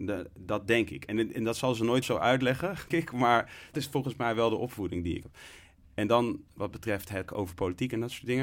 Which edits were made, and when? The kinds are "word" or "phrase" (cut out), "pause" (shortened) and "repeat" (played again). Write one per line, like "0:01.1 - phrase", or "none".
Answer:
0:01.3 - word
0:02.0 - word
0:02.9 - word
0:03.7 - word
0:05.2 - word
0:06.6 - word
0:07.3 - word

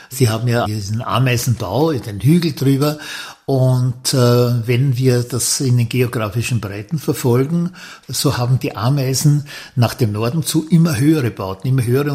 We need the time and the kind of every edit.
none

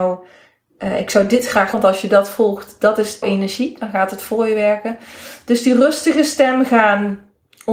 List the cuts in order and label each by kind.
0:01.7 - word
0:03.2 - word

